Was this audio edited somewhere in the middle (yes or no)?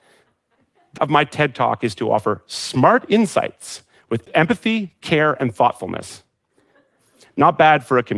yes